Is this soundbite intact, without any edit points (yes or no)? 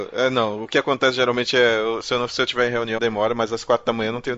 no